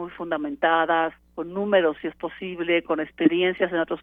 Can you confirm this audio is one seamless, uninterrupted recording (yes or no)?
no